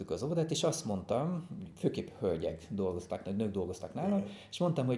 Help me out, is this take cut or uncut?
uncut